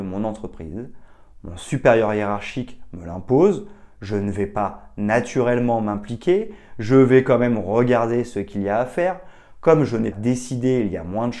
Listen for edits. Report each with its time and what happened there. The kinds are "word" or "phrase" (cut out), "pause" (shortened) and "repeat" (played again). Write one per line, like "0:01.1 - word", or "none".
0:10.1 - word